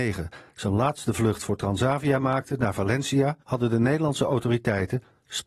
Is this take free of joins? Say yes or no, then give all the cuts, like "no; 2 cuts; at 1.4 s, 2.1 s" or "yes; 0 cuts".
no; 1 cut; at 3.4 s